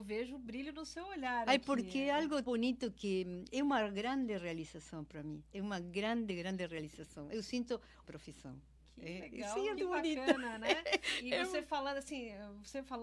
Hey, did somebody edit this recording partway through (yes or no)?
yes